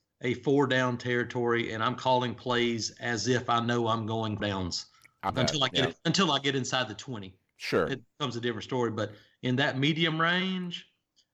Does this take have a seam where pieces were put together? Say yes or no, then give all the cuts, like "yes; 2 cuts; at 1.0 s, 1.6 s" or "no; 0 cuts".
yes; 3 cuts; at 4.4 s, 5.3 s, 7.9 s